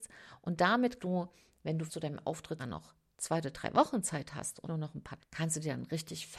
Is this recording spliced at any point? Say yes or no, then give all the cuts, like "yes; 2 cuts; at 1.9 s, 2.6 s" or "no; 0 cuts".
yes; 5 cuts; at 1.0 s, 1.9 s, 2.6 s, 4.6 s, 5.2 s